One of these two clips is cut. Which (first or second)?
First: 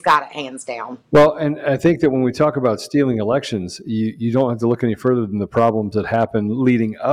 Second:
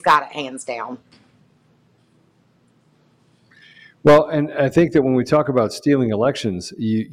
first